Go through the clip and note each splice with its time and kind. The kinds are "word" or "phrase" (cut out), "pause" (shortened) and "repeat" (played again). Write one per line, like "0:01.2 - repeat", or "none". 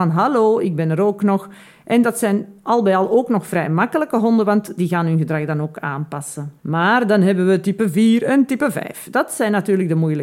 0:06.6 - pause